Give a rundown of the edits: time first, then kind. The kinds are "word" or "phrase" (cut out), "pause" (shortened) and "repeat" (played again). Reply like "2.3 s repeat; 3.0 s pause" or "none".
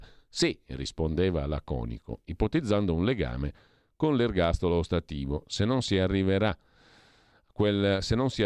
none